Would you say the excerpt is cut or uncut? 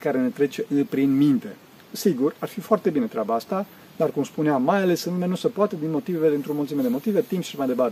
uncut